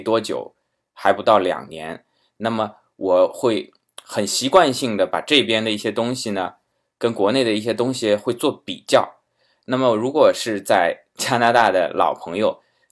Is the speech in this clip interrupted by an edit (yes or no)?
no